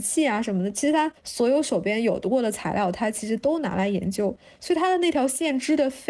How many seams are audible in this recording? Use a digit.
1